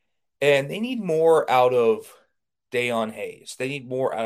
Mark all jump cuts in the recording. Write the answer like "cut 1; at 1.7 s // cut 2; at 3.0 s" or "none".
none